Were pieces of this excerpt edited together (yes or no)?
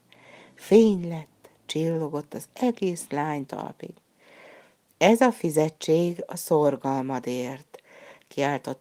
yes